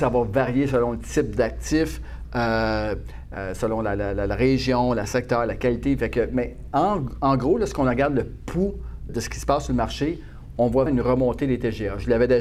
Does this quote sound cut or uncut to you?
cut